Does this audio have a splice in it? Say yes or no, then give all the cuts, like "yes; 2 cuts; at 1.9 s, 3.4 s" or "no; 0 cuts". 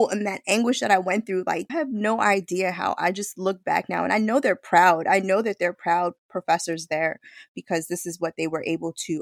yes; 1 cut; at 1.7 s